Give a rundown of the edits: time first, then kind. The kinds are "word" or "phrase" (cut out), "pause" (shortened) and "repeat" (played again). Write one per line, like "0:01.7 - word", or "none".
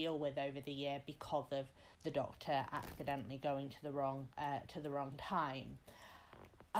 0:01.9 - pause
0:04.3 - pause